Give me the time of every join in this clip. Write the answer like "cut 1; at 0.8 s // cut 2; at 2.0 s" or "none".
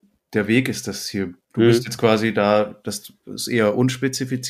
none